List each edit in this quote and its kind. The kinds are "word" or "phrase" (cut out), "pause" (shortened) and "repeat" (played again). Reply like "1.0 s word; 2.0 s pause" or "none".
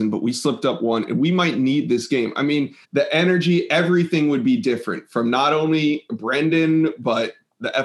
2.8 s pause

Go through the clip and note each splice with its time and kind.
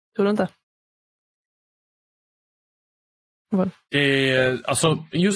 none

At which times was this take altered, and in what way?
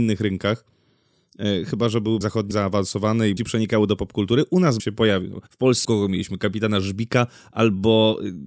2.2 s word; 2.5 s phrase; 3.4 s phrase; 4.8 s phrase; 5.5 s pause; 5.8 s phrase

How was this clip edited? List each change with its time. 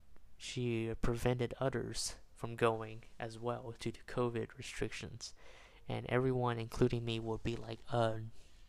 none

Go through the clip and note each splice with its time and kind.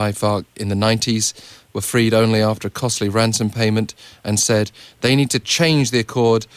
none

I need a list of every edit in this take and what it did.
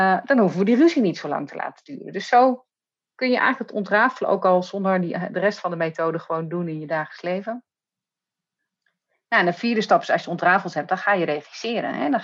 none

